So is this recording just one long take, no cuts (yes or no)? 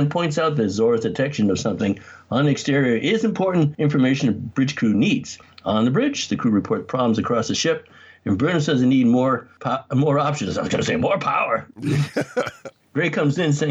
yes